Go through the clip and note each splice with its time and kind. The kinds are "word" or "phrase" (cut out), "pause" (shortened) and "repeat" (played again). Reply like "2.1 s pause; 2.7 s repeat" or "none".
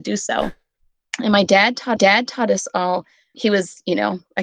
2.0 s repeat; 3.3 s word

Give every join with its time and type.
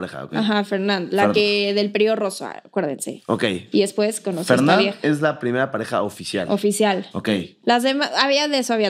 none

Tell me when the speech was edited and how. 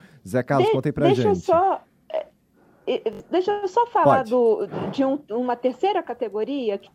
none

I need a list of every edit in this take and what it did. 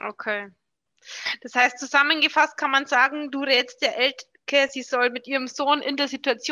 none

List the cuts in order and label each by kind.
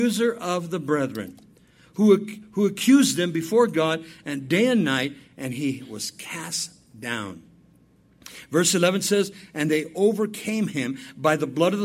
none

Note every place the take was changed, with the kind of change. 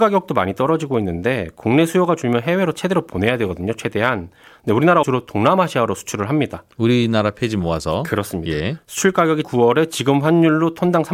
5.0 s word; 9.4 s word

